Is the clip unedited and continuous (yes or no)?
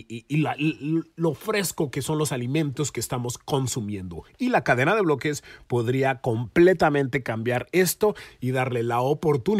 yes